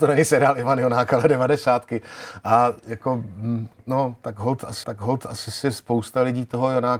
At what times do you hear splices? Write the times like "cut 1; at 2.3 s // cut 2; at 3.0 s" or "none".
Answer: cut 1; at 4.8 s